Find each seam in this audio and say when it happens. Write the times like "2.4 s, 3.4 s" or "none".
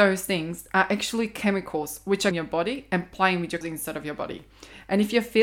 2.3 s, 3.6 s